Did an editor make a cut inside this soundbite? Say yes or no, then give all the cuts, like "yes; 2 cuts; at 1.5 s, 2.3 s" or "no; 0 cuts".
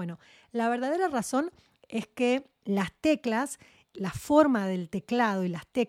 no; 0 cuts